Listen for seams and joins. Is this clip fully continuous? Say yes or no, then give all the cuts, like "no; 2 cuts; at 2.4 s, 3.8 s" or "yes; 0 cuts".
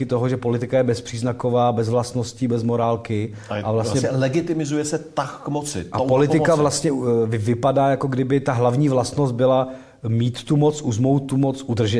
yes; 0 cuts